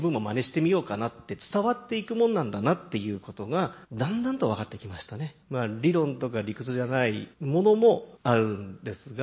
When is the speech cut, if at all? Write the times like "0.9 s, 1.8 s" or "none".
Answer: 3.8 s, 5.4 s, 7.3 s, 8.2 s